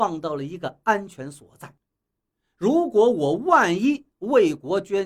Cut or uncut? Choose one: uncut